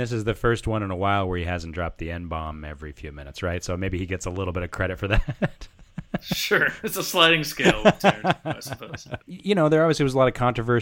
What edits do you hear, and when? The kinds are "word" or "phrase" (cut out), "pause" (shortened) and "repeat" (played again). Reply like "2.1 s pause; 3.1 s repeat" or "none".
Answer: 9.2 s pause

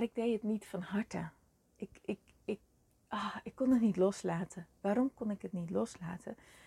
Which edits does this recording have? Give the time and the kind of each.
none

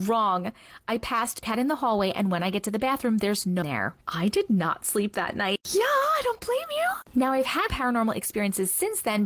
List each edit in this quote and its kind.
1.4 s word; 3.6 s phrase; 4.0 s pause; 7.7 s word

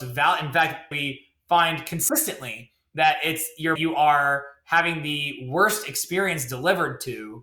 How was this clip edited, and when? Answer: 0.9 s phrase; 3.8 s phrase

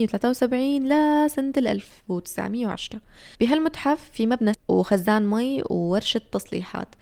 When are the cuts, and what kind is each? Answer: 3.3 s pause; 4.5 s word

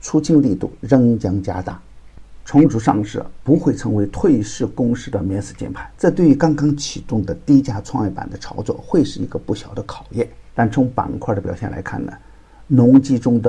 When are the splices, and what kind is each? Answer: 5.9 s pause; 10.5 s pause

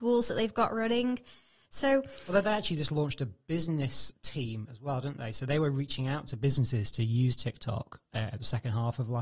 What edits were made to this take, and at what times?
none

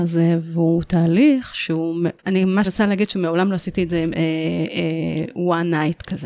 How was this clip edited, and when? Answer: 2.2 s pause; 2.6 s word

